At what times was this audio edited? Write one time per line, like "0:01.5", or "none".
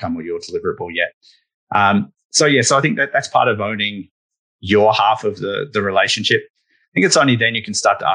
none